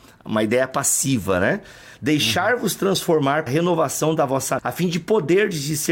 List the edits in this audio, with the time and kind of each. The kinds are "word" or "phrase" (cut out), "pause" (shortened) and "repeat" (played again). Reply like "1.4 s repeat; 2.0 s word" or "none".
3.5 s word; 4.6 s word

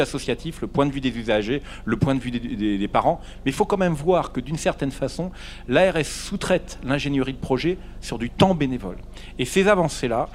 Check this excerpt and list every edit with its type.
none

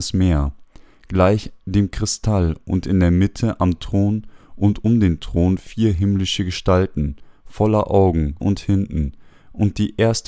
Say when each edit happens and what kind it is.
8.4 s word

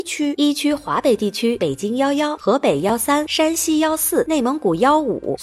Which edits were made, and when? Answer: 2.4 s phrase

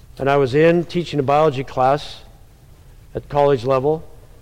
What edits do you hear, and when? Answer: none

